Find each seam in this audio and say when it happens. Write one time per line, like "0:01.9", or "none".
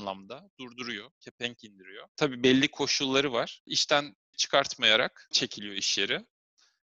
0:04.3
0:05.3